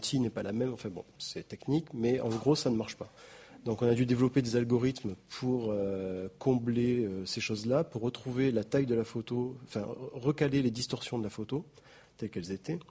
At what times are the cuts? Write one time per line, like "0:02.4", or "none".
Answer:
none